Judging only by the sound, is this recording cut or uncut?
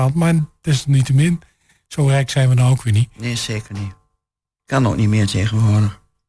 uncut